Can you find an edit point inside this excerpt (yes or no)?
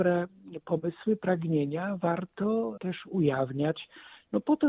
yes